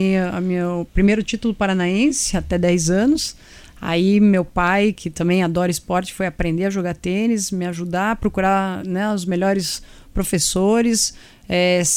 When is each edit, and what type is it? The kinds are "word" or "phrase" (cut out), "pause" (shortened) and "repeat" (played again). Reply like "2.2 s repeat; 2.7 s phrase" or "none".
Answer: none